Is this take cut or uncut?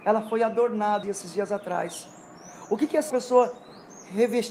cut